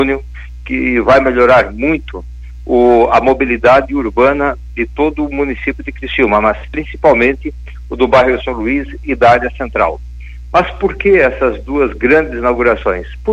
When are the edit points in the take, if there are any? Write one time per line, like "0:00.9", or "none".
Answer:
none